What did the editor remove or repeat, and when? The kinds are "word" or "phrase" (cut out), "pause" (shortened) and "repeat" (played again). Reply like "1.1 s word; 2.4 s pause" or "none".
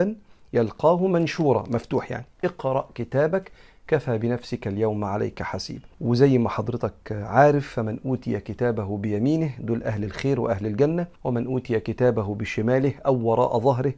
2.3 s pause; 5.9 s pause; 11.2 s pause